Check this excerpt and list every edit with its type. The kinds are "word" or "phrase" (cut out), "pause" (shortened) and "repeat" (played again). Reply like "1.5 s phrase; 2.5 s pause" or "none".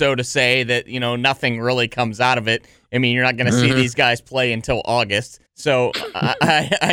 5.5 s pause